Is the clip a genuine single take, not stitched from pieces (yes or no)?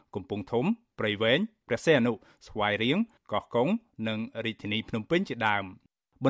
yes